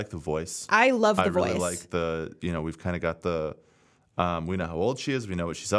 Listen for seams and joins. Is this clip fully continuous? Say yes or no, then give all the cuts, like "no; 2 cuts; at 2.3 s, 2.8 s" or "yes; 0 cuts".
yes; 0 cuts